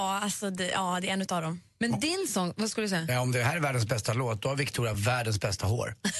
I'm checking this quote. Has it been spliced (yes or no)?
no